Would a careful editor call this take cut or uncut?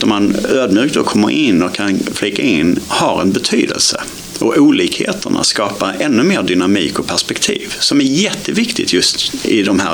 uncut